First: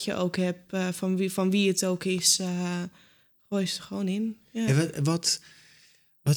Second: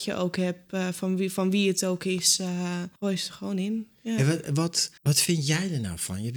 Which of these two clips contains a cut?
second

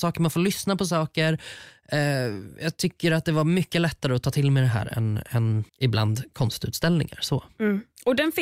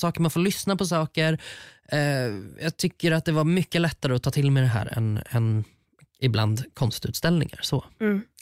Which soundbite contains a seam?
first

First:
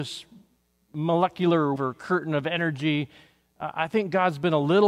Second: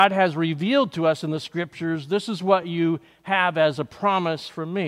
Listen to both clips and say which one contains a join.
first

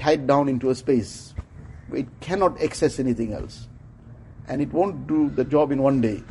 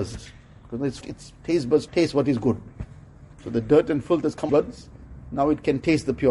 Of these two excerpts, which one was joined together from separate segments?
second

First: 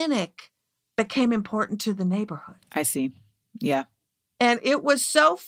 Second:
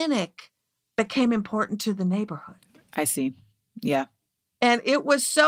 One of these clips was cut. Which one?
first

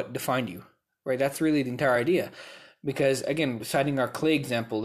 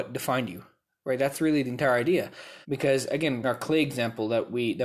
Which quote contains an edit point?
second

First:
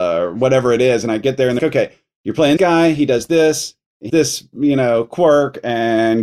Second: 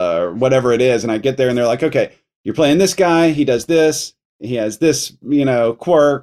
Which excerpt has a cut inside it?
first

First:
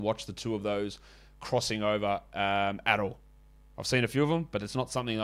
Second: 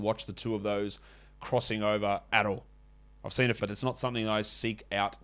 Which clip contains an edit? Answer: second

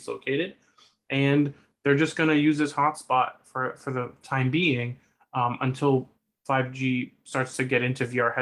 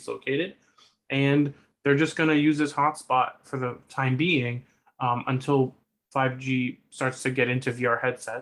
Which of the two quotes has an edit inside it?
second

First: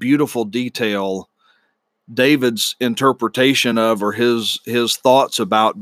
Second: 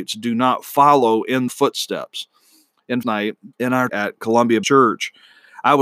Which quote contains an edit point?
second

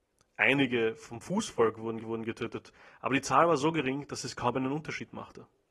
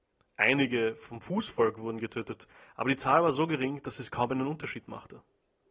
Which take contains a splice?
first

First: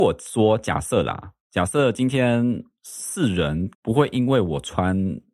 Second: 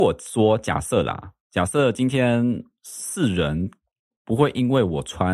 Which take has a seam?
first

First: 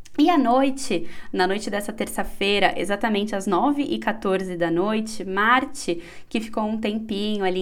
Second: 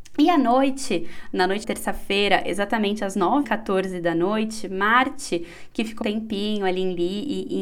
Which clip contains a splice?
second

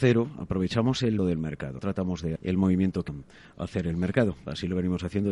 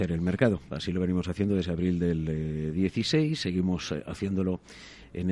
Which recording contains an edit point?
first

